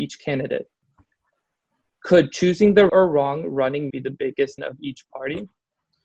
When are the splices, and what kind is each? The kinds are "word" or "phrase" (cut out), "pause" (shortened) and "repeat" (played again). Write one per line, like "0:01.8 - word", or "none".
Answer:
0:02.9 - word
0:03.9 - word
0:04.6 - word